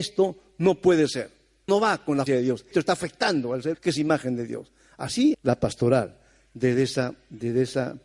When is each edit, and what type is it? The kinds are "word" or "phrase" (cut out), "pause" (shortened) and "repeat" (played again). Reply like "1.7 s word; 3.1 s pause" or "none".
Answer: 1.7 s word; 2.3 s word; 2.7 s word; 3.7 s word; 5.3 s word

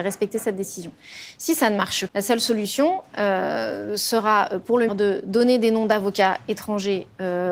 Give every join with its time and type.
2.1 s word; 4.9 s word

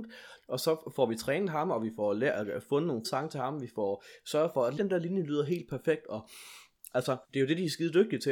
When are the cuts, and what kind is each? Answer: 3.0 s word; 4.8 s word; 7.2 s pause

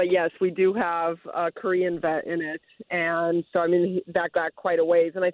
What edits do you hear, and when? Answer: 4.3 s word

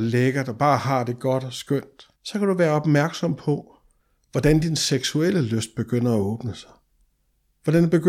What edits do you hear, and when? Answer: 2.2 s pause; 4.0 s pause

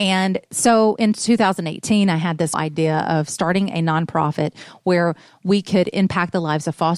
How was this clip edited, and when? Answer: 2.5 s word

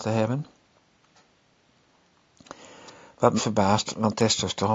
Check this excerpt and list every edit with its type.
3.4 s word

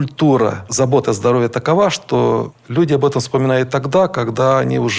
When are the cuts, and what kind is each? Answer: none

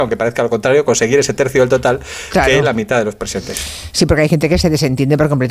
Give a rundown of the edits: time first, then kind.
none

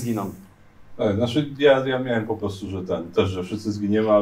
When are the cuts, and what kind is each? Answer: none

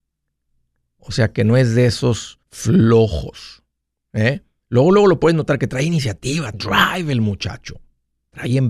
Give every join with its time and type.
2.4 s pause; 6.5 s word

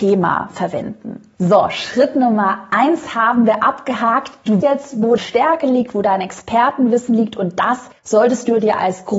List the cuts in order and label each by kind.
4.6 s word; 5.2 s word; 8.0 s pause

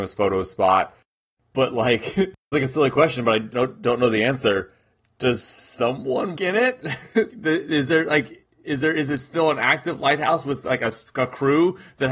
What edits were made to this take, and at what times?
2.5 s word; 3.5 s word; 6.4 s word; 7.3 s word

